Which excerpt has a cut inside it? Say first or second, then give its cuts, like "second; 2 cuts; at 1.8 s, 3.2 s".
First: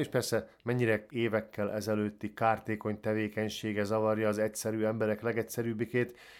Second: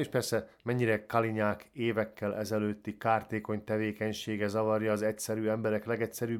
first; 1 cut; at 1.1 s